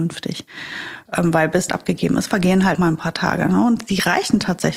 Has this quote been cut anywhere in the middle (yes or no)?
yes